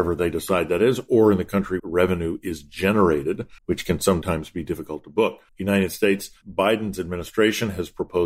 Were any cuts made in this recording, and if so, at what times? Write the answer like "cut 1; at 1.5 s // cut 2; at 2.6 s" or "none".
cut 1; at 1.8 s // cut 2; at 3.6 s // cut 3; at 5.5 s